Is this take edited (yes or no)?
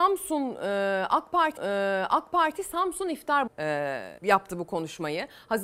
yes